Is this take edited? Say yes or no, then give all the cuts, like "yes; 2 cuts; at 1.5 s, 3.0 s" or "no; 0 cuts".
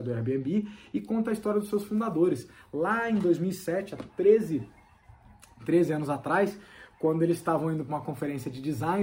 no; 0 cuts